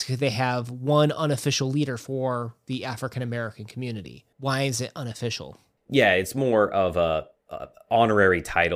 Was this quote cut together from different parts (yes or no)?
yes